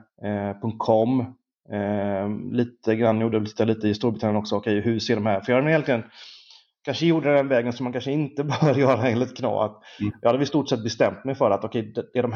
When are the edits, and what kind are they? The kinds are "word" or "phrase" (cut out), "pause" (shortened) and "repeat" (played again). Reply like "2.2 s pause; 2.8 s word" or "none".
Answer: none